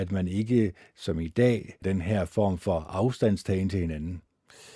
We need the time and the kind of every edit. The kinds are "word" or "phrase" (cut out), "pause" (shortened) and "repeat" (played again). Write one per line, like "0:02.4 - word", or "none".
0:01.8 - word